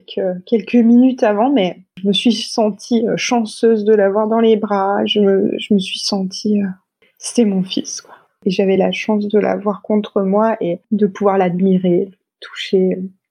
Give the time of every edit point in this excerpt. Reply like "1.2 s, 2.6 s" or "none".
none